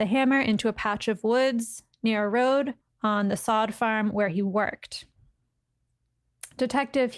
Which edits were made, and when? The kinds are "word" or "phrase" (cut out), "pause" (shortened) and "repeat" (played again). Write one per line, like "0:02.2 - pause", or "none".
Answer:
0:02.8 - pause

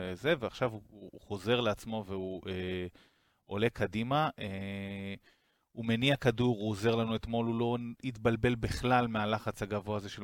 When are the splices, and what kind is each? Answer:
none

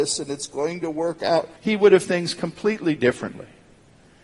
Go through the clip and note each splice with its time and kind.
0:01.6 - pause
0:02.0 - word

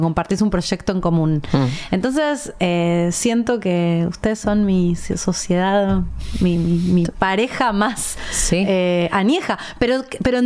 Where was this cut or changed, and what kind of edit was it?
none

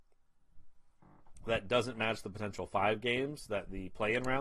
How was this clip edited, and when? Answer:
none

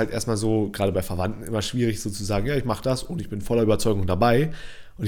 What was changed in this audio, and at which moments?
none

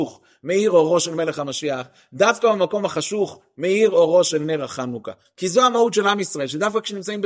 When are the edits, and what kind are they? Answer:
none

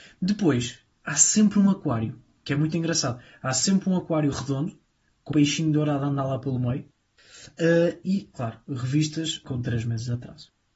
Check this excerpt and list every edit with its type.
0:05.3 - word

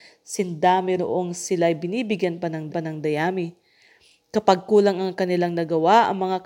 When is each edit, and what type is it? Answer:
0:01.0 - word
0:02.7 - repeat

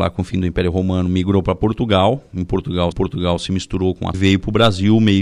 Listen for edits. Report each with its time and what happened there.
0:02.9 - repeat
0:04.1 - phrase

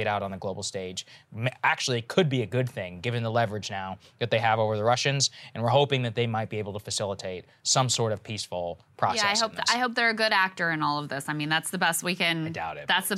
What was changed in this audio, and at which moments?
none

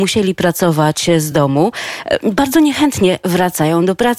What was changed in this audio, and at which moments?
none

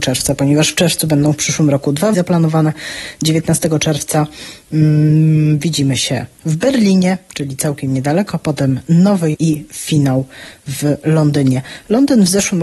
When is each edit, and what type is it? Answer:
0:02.1 - word
0:09.3 - word

